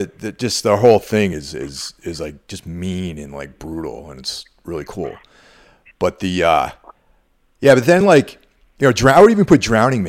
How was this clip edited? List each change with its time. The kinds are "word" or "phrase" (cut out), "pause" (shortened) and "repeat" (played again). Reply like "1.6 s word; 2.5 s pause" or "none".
none